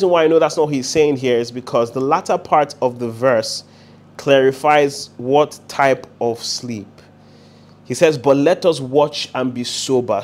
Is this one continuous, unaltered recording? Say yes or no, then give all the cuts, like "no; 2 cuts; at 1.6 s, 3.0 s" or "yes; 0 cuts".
yes; 0 cuts